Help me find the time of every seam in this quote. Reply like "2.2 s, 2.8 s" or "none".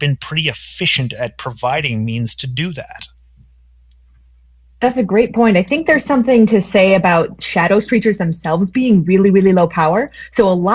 none